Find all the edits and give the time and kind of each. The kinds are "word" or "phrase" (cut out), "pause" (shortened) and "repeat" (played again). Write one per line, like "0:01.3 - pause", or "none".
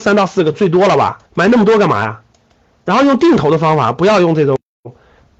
0:01.3 - pause